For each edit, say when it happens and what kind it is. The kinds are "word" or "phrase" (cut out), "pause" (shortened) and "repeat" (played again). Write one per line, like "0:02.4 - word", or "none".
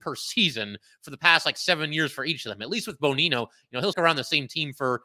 0:03.9 - word